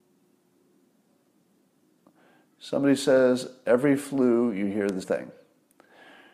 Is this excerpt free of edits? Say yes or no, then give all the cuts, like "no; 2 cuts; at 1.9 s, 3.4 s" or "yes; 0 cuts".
no; 1 cut; at 5.0 s